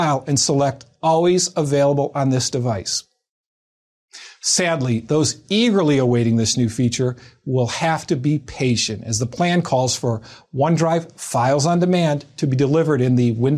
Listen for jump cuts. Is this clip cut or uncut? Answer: uncut